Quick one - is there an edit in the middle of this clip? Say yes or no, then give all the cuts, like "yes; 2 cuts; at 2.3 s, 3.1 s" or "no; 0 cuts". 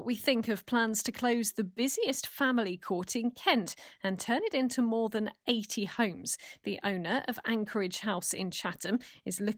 no; 0 cuts